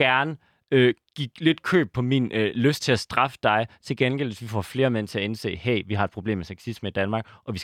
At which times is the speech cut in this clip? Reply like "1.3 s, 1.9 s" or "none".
none